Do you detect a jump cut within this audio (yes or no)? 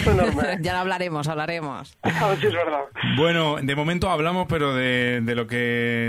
no